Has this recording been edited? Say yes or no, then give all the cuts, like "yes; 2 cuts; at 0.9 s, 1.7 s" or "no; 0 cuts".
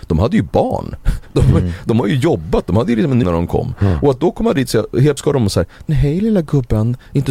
yes; 3 cuts; at 3.2 s, 5.2 s, 5.9 s